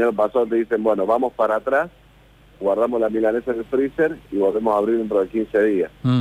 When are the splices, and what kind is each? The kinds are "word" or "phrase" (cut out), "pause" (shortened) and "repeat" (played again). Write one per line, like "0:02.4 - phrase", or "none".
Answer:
none